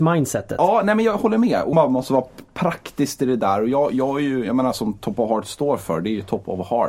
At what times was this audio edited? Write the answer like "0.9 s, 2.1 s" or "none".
1.7 s